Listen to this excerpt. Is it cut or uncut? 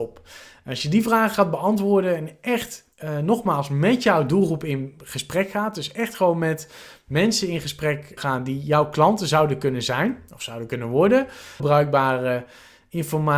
cut